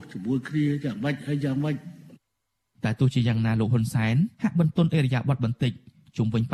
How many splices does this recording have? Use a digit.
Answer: 1